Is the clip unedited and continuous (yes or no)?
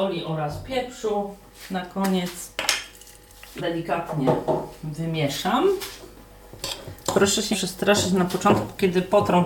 no